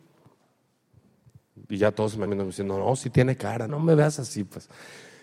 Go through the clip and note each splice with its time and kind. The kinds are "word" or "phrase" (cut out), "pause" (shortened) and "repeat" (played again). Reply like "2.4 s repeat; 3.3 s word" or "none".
2.3 s word; 3.7 s word